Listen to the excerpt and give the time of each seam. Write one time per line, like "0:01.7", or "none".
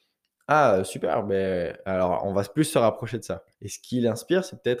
0:03.5